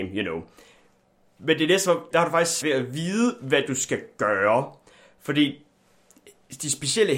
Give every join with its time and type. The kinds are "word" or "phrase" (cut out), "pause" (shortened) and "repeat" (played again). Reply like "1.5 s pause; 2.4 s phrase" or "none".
2.1 s phrase; 2.6 s word